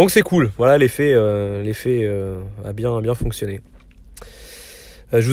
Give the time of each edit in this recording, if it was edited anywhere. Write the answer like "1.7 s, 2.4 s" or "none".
none